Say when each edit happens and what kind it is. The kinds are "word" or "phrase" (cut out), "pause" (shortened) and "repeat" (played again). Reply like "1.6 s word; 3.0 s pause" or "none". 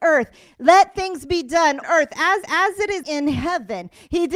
1.8 s word; 2.4 s repeat; 3.0 s word